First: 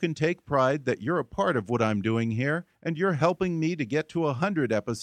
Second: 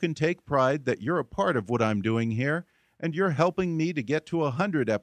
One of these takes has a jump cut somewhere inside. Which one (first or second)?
first